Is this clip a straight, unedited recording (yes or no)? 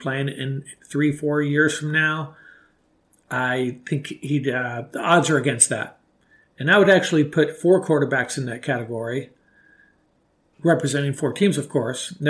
yes